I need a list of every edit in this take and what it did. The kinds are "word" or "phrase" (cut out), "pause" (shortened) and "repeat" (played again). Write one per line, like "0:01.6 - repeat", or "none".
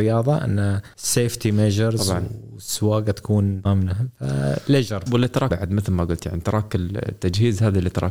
0:00.9 - pause
0:03.6 - word
0:05.1 - word
0:05.5 - word